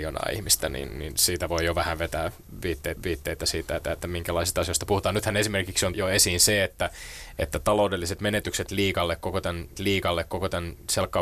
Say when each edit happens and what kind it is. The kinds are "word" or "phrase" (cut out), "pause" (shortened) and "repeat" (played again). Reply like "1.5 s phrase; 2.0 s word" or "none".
3.0 s repeat; 3.8 s repeat; 5.9 s phrase; 9.7 s repeat